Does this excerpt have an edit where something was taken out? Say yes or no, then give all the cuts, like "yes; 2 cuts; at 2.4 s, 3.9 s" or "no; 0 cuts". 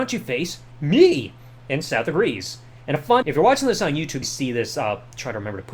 yes; 3 cuts; at 2.8 s, 3.2 s, 4.2 s